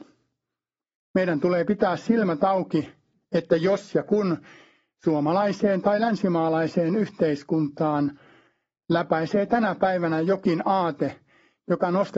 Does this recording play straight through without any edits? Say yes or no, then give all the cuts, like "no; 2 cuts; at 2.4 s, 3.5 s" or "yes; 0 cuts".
yes; 0 cuts